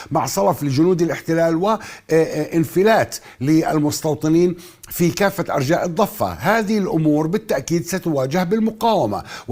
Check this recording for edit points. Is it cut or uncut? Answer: uncut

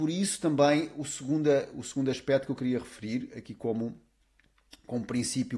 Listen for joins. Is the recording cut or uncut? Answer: uncut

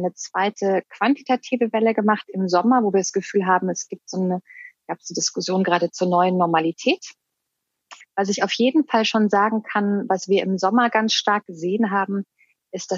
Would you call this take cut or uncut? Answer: uncut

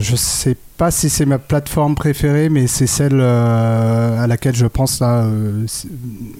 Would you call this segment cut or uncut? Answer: uncut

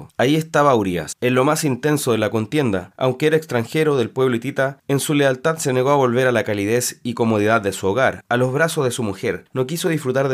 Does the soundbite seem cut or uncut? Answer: uncut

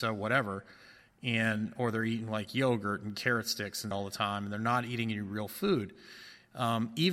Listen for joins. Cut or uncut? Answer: cut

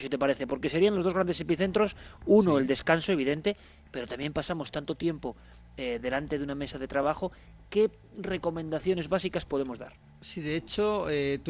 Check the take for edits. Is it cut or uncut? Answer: uncut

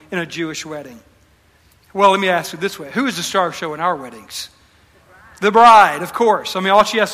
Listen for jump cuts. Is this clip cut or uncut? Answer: uncut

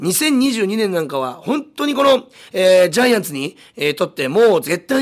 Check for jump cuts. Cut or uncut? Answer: uncut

